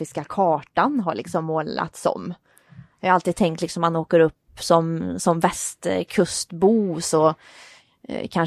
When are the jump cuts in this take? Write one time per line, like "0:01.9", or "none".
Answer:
none